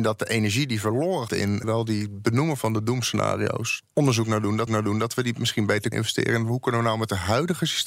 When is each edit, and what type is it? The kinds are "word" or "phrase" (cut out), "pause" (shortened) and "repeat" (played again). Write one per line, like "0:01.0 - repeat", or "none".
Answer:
0:01.3 - word
0:01.6 - word
0:03.8 - word
0:04.7 - repeat
0:05.9 - word